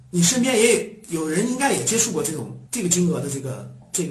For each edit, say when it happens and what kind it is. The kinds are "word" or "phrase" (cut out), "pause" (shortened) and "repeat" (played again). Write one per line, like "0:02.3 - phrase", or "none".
0:02.7 - pause

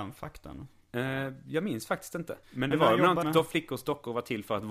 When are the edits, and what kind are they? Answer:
0:02.4 - pause
0:03.2 - phrase

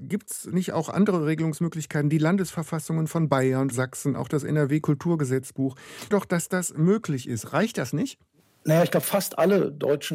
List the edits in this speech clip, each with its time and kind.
0:03.7 - word
0:06.1 - word

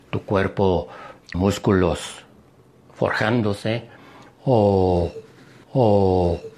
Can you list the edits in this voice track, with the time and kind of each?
0:01.3 - word
0:05.6 - repeat

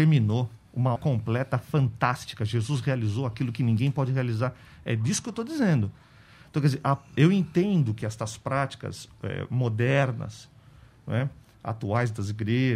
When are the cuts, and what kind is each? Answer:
0:01.0 - word

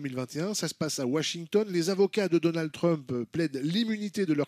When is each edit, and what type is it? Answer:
none

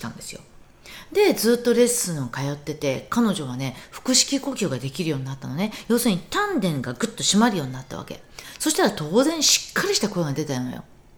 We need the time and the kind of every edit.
none

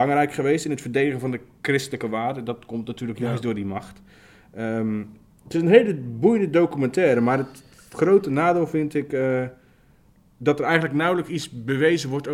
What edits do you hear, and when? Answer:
none

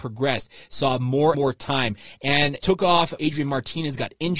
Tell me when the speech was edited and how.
0:01.3 - word
0:02.6 - word
0:03.2 - word

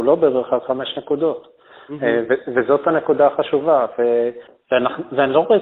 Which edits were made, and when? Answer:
none

